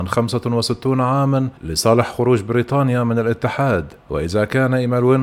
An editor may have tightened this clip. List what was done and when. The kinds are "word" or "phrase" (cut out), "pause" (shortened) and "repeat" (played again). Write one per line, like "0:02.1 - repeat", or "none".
0:01.6 - pause
0:04.0 - pause